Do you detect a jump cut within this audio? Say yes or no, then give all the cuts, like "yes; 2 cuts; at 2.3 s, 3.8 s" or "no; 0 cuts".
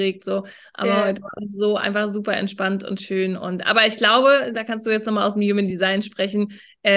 no; 0 cuts